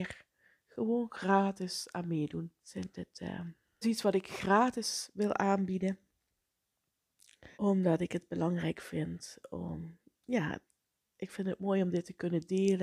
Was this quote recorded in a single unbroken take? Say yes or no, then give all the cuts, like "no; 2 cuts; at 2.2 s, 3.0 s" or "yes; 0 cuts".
no; 3 cuts; at 2.6 s, 3.8 s, 7.5 s